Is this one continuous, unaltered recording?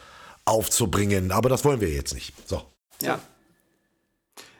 yes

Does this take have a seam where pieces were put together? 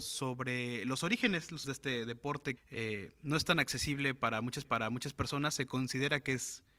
yes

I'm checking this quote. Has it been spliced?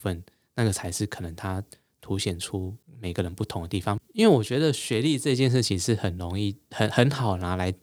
no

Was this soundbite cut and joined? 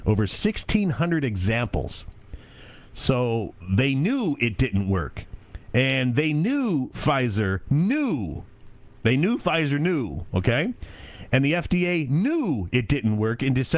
no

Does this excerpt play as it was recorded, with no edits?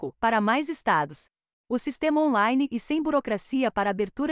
yes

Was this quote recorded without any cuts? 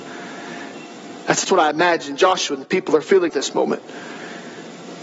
no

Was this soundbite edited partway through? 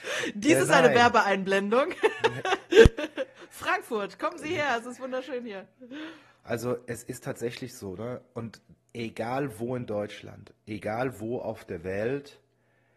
yes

